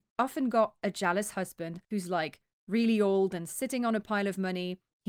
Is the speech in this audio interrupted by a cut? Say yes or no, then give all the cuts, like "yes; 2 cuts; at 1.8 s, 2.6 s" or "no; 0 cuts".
no; 0 cuts